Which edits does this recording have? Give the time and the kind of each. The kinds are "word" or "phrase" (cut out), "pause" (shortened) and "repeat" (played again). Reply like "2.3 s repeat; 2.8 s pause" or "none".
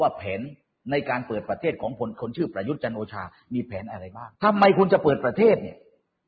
4.3 s pause